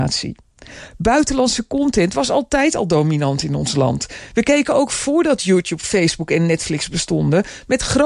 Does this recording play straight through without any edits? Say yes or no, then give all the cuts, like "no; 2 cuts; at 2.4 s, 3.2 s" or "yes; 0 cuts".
yes; 0 cuts